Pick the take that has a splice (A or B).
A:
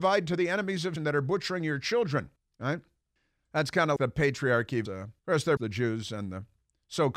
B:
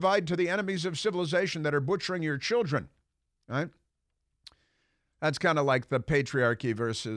A